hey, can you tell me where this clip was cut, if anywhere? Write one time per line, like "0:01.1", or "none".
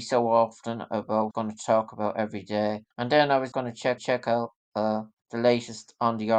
0:01.3
0:02.9
0:03.5
0:04.0
0:05.2